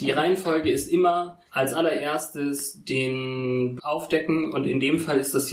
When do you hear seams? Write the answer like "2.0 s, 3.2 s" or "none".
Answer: 1.5 s, 3.8 s